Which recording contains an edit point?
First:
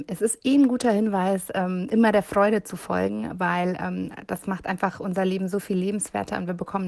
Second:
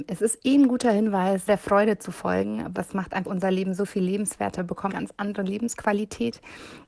second; 5 cuts; at 1.5 s, 2.7 s, 3.2 s, 4.6 s, 4.9 s

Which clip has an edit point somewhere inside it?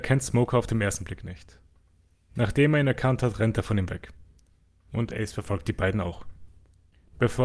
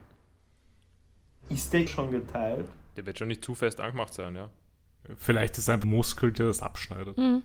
second; 2 cuts; at 1.9 s, 5.8 s

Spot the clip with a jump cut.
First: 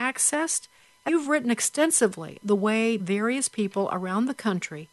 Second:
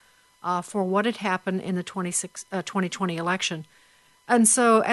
first; 3 cuts; at 1.1 s, 2.4 s, 3.0 s

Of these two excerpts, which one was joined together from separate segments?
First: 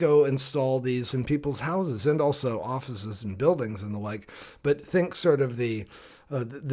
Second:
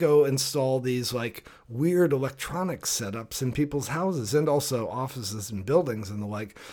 first; 1 cut; at 1.1 s

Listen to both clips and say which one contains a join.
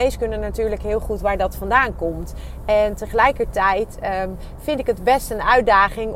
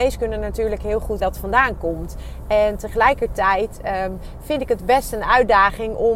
second; 1 cut; at 1.2 s

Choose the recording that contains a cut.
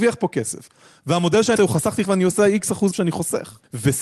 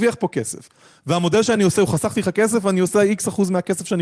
first; 3 cuts; at 1.6 s, 2.0 s, 2.9 s

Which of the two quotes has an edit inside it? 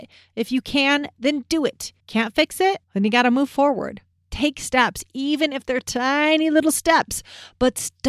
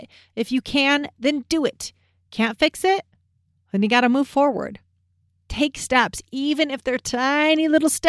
first; 3 cuts; at 2.0 s, 2.8 s, 4.1 s

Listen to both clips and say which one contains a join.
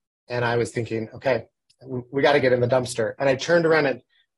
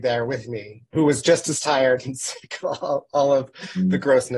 second; 1 cut; at 0.9 s

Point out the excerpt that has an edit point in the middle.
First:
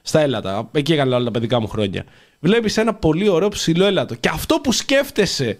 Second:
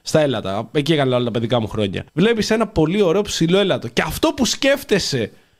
second; 1 cut; at 2.1 s

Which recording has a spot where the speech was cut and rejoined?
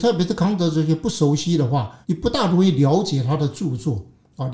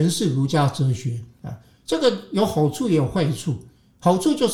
first; 1 cut; at 2.0 s

